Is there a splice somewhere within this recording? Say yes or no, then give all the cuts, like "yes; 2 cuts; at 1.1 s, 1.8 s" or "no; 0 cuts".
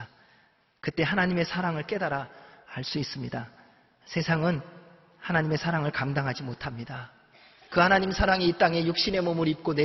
no; 0 cuts